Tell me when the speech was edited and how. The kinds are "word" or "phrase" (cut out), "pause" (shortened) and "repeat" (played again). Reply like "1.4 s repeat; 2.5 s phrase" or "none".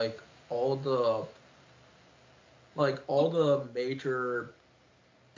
none